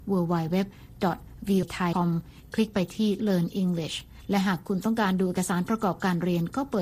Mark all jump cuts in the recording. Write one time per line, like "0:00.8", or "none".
0:01.6
0:01.9
0:03.2

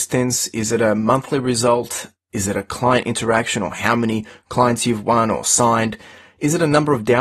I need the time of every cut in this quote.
none

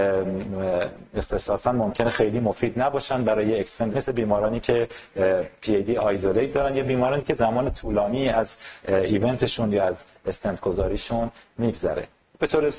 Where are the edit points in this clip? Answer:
0:03.9

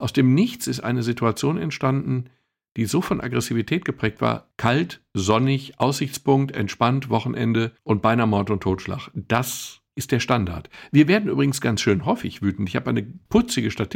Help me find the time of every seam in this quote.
none

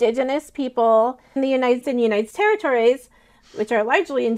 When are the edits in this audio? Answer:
0:01.4
0:01.8
0:02.3

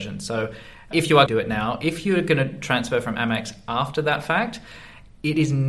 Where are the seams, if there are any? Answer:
0:00.9
0:01.3

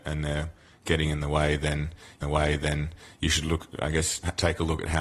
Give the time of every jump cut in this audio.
0:02.2

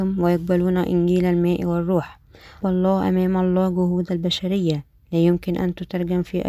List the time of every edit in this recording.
0:02.6

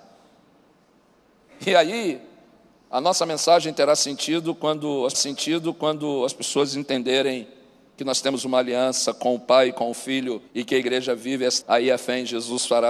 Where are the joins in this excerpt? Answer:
0:05.1
0:10.5
0:11.6

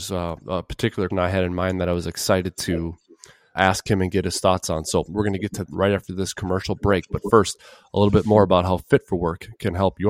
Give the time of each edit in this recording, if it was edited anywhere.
0:01.1
0:03.6
0:05.7

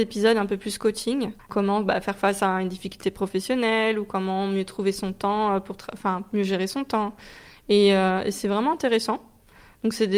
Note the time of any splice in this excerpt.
0:01.4

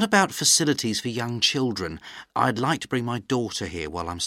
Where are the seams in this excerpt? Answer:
0:02.3

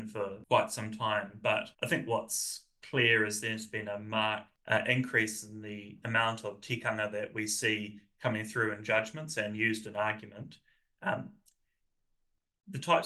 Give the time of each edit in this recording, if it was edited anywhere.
0:01.7

